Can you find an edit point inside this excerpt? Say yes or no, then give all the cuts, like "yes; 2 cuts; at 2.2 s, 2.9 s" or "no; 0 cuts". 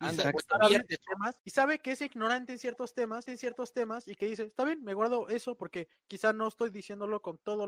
yes; 2 cuts; at 1.4 s, 3.3 s